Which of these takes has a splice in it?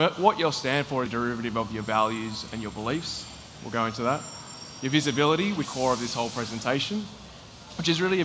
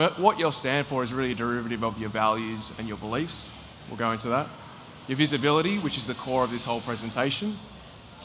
first; 2 cuts; at 1.1 s, 5.6 s

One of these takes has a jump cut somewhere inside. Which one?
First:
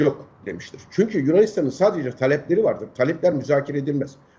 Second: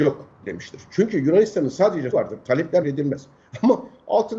second; 2 cuts; at 2.1 s, 2.8 s

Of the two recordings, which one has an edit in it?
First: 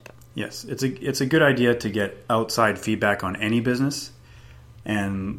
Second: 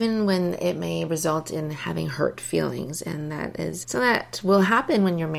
second; 1 cut; at 3.8 s

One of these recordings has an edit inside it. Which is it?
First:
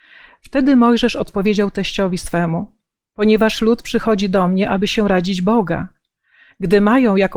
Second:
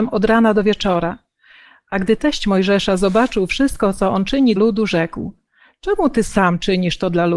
second; 1 cut; at 4.6 s

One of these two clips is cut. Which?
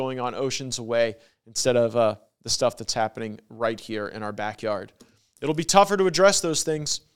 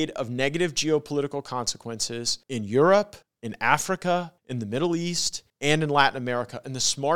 second; 4 cuts; at 2.4 s, 3.2 s, 4.4 s, 5.5 s

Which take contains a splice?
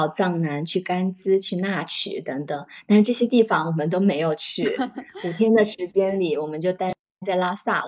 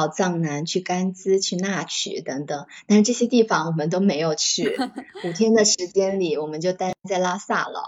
second; 1 cut; at 7.0 s

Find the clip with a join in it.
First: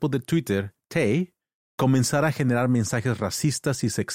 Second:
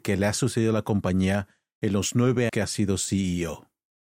second; 1 cut; at 2.5 s

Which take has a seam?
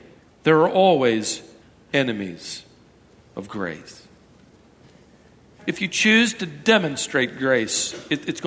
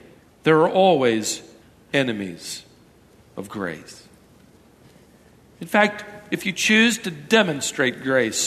first; 1 cut; at 5.6 s

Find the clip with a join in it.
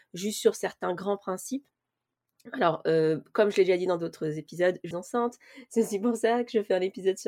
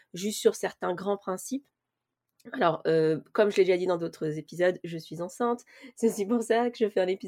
first; 1 cut; at 4.9 s

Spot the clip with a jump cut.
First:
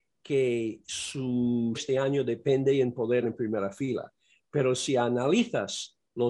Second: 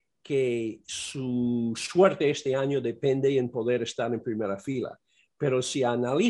first; 2 cuts; at 1.7 s, 3.2 s

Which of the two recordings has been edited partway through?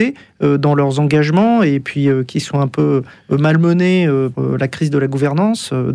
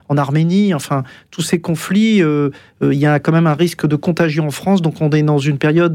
first; 1 cut; at 4.3 s

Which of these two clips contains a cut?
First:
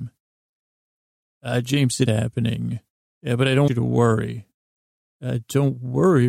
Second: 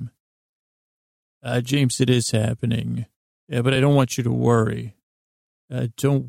first; 2 cuts; at 2.1 s, 3.7 s

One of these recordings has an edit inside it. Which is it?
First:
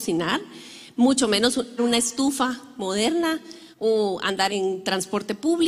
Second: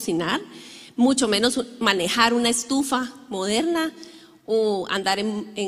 first; 3 cuts; at 1.8 s, 3.7 s, 4.5 s

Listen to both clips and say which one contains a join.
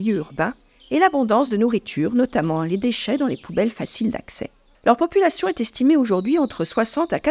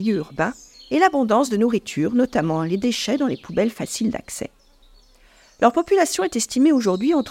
first; 1 cut; at 4.7 s

